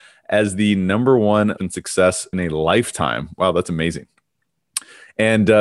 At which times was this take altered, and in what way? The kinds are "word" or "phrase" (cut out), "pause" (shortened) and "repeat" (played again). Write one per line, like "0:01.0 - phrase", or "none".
0:01.6 - word
0:02.3 - phrase